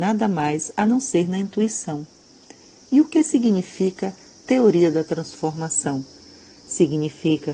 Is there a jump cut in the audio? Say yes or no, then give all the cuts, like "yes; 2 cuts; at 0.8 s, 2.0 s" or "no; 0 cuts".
no; 0 cuts